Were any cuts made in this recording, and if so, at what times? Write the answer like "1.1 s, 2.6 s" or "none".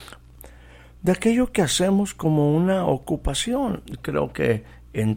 none